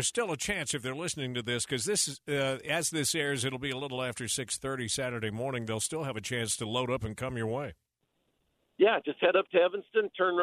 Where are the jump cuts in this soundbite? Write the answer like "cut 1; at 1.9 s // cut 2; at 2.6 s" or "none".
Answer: none